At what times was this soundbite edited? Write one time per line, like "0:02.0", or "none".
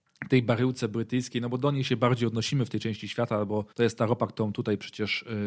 0:03.7